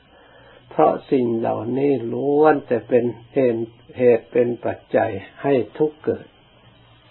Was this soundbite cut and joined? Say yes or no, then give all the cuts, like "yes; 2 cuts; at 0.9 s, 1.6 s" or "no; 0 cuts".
yes; 1 cut; at 3.2 s